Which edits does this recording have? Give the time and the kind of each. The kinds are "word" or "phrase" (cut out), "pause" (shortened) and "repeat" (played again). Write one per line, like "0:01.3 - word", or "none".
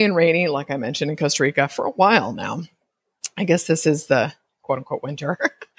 none